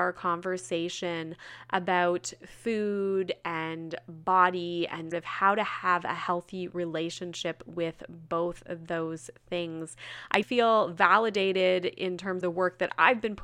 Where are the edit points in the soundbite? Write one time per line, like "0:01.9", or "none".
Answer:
0:05.1
0:10.4
0:12.4